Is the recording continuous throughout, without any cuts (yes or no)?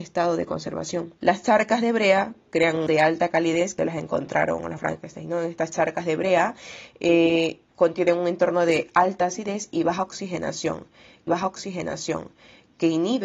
no